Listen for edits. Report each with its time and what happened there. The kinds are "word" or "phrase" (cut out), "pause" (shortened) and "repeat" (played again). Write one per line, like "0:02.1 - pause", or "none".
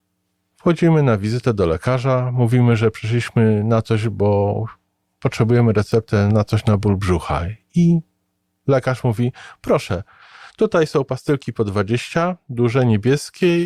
0:06.3 - word

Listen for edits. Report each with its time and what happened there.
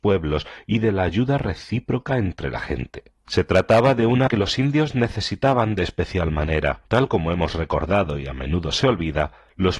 0:04.3 - word
0:06.9 - pause

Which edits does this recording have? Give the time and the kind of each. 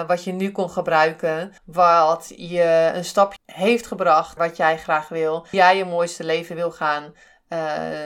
0:01.6 - pause
0:03.4 - word
0:04.4 - word
0:05.5 - word

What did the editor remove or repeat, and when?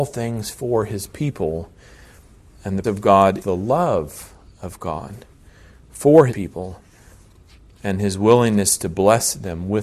0:02.8 - word
0:03.4 - word
0:06.3 - word

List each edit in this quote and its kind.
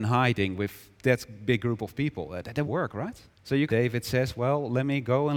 0:00.9 - pause
0:02.7 - word
0:03.3 - pause
0:03.7 - phrase

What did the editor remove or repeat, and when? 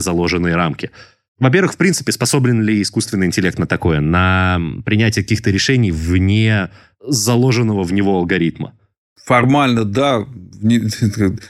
none

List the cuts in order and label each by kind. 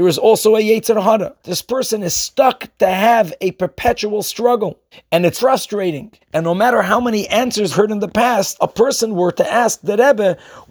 0:01.4 - pause
0:04.9 - pause
0:05.3 - word
0:06.2 - pause
0:07.7 - phrase
0:08.6 - word

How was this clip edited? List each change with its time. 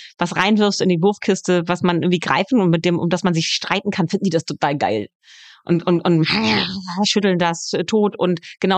none

